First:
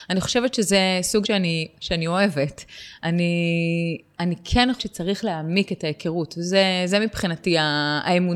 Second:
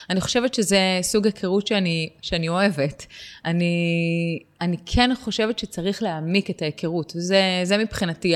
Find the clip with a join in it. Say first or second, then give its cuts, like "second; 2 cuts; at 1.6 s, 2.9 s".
first; 2 cuts; at 1.2 s, 4.8 s